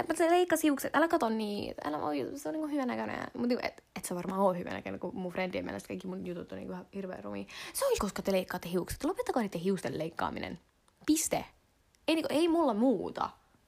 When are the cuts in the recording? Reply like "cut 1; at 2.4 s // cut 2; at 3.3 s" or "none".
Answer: cut 1; at 8.0 s // cut 2; at 10.7 s